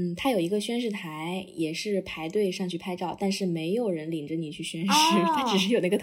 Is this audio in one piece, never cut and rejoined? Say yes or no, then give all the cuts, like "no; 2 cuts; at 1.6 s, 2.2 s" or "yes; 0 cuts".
yes; 0 cuts